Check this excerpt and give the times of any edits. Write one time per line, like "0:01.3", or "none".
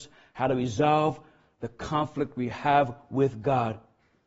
none